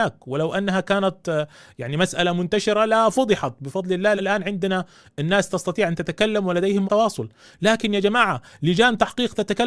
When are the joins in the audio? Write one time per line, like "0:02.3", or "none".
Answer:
0:04.2
0:06.8